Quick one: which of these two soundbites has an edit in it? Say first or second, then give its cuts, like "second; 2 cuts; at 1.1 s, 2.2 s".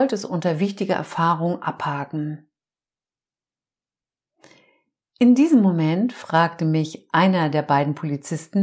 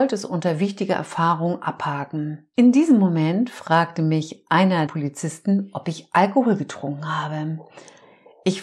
second; 2 cuts; at 2.5 s, 4.9 s